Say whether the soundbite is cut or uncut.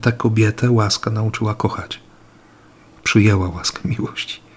uncut